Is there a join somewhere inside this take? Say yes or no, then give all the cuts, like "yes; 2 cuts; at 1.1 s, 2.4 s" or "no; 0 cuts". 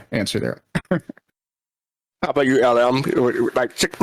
no; 0 cuts